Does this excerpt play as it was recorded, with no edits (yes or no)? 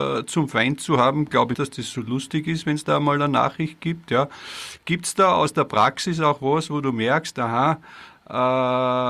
no